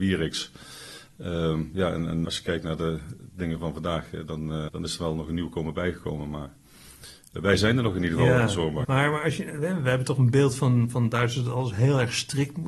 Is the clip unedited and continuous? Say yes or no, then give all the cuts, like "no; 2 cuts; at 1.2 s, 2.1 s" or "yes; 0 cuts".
no; 3 cuts; at 2.2 s, 4.7 s, 8.8 s